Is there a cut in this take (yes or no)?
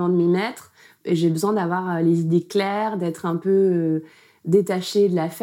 no